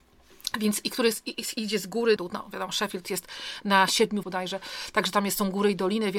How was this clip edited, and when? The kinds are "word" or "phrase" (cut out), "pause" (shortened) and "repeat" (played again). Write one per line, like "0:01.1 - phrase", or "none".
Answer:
0:02.2 - word
0:04.2 - word